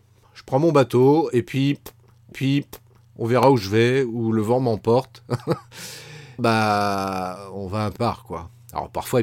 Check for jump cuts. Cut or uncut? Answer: cut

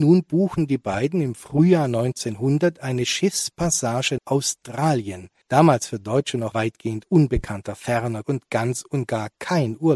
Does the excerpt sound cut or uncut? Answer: cut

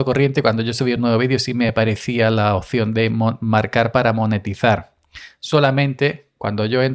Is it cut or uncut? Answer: uncut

